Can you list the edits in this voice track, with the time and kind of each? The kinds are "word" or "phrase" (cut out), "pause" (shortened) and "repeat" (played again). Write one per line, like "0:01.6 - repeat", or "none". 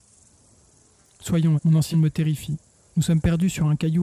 0:01.6 - word
0:01.9 - word
0:02.7 - pause

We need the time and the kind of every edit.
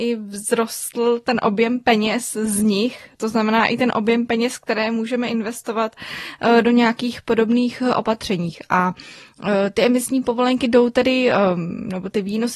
none

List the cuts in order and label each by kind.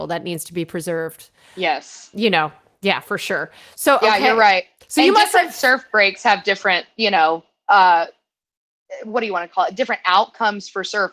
none

